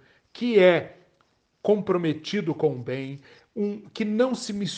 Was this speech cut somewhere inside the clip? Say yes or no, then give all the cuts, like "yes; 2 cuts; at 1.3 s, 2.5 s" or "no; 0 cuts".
no; 0 cuts